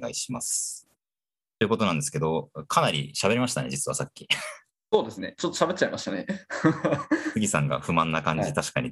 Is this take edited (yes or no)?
yes